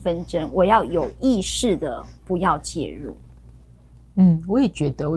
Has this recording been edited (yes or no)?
no